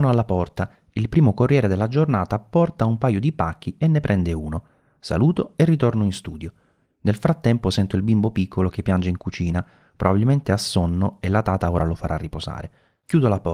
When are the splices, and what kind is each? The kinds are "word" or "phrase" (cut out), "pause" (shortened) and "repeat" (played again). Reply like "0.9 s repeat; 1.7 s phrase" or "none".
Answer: none